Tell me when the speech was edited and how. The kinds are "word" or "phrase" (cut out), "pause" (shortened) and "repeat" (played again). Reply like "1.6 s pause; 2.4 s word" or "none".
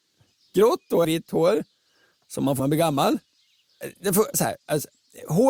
1.0 s word; 2.6 s word; 4.3 s word